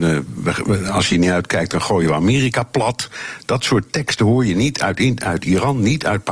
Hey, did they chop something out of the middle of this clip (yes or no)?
no